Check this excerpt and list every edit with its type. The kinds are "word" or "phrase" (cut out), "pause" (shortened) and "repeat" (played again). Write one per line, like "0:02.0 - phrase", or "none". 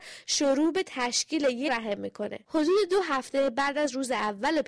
0:01.7 - phrase